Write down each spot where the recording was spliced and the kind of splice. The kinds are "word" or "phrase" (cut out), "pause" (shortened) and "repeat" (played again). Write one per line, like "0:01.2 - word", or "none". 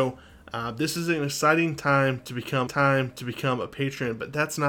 0:02.7 - repeat